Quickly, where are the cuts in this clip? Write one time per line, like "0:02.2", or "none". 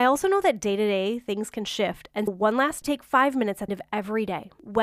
0:02.3
0:02.8
0:03.7